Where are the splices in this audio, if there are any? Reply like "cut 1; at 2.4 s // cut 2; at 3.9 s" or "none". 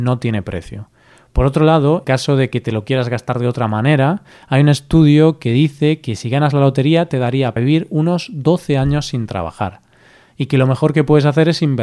cut 1; at 2.0 s // cut 2; at 7.6 s

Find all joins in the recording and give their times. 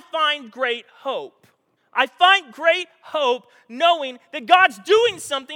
cut 1; at 1.8 s

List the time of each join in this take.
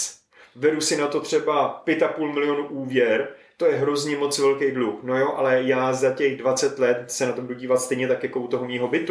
none

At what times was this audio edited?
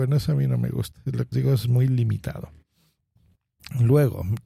cut 1; at 1.3 s

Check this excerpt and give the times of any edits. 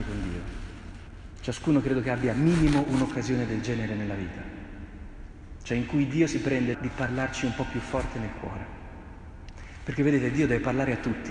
cut 1; at 6.7 s

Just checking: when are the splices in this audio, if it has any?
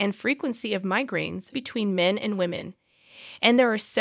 cut 1; at 1.5 s

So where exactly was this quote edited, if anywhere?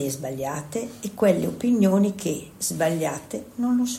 none

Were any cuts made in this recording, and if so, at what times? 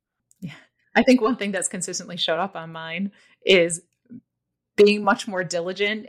none

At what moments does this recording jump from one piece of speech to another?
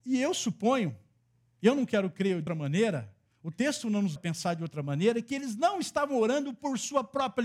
cut 1; at 2.5 s // cut 2; at 4.2 s

